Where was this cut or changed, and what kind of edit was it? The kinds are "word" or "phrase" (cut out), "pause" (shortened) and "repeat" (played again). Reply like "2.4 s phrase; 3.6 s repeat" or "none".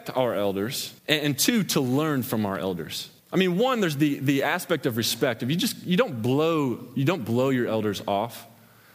1.0 s pause; 3.2 s pause